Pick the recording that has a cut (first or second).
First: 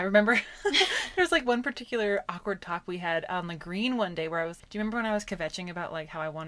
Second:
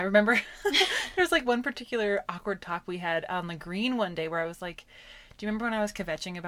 first